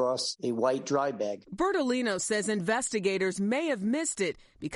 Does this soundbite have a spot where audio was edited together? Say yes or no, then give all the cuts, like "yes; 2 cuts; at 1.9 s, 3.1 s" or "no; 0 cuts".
no; 0 cuts